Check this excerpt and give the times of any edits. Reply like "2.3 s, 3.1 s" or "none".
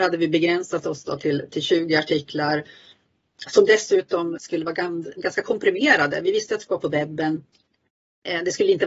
4.4 s